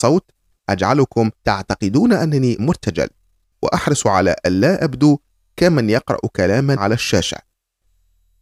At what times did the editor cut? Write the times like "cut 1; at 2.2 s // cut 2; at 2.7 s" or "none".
cut 1; at 1.3 s // cut 2; at 2.6 s // cut 3; at 6.8 s